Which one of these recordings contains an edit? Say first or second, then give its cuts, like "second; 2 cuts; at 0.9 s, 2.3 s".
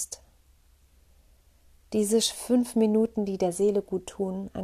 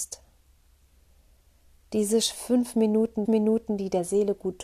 second; 1 cut; at 3.2 s